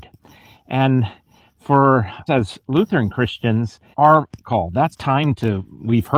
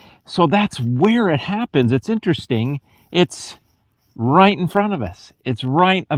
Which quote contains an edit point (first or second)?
first